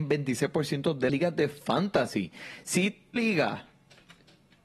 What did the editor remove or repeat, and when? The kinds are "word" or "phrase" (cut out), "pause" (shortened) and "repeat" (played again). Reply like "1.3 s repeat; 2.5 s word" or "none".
1.1 s word; 3.2 s word